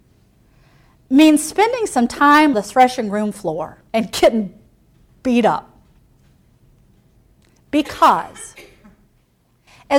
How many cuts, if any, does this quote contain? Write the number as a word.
two